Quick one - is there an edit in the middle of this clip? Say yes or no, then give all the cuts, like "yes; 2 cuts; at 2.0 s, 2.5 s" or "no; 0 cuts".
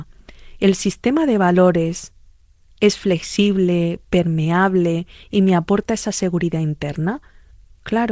no; 0 cuts